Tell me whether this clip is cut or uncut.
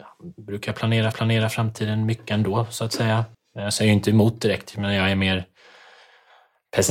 cut